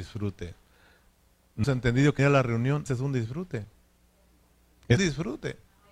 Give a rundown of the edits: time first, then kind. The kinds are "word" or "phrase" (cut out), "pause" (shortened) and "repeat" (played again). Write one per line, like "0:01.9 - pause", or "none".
0:01.6 - word
0:02.2 - word
0:02.9 - word
0:05.0 - word